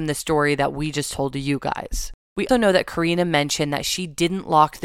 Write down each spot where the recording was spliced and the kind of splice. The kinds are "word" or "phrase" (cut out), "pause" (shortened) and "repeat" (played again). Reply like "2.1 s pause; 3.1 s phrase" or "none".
2.5 s word